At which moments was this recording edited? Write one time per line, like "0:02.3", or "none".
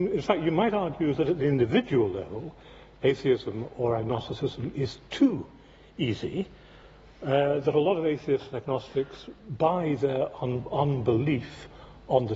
none